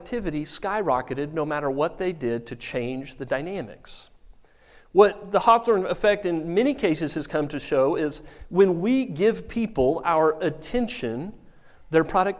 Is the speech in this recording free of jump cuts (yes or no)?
yes